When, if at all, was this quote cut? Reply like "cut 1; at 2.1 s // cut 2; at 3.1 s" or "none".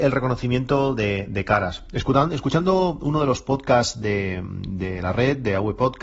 none